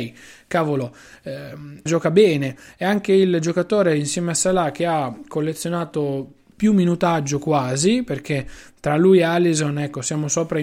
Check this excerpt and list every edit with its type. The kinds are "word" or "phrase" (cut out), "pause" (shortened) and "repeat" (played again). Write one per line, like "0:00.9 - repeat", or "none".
0:01.9 - word